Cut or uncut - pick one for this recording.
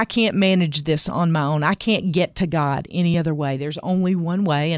uncut